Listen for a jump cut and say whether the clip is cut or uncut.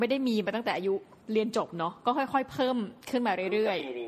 cut